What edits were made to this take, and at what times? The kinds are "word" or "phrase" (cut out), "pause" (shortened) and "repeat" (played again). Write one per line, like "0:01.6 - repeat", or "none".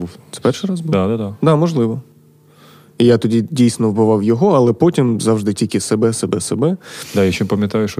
none